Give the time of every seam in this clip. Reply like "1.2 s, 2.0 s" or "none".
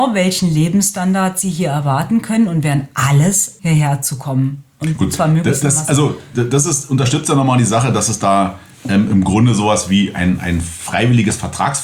3.6 s